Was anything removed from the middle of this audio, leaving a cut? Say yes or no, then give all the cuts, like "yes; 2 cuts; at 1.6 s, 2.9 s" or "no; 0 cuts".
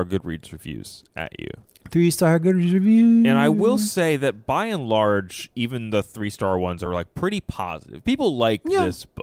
no; 0 cuts